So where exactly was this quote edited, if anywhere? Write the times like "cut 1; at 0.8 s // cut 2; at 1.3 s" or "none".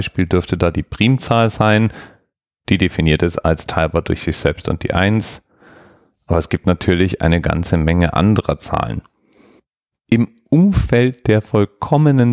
none